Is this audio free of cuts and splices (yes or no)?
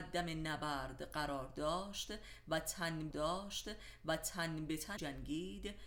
no